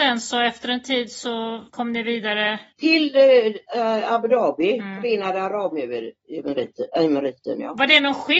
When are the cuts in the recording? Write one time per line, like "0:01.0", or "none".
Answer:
0:01.7
0:02.7